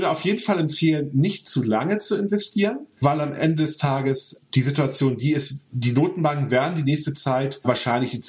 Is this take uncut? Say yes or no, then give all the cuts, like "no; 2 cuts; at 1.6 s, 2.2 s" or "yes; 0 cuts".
yes; 0 cuts